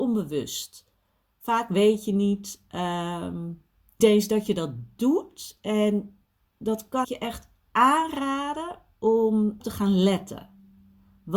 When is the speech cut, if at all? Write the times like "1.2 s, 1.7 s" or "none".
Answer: 4.0 s, 7.0 s, 9.6 s